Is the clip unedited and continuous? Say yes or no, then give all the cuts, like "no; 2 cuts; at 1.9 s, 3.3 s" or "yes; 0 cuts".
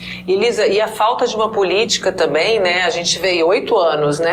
yes; 0 cuts